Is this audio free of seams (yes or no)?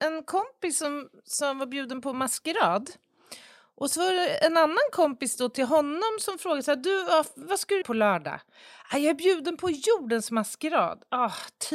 no